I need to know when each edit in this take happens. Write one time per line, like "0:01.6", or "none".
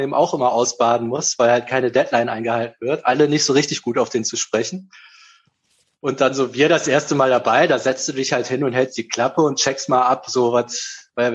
none